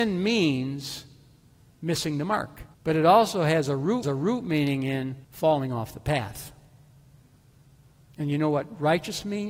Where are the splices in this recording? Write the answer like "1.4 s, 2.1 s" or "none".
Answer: 2.7 s, 4.0 s, 5.2 s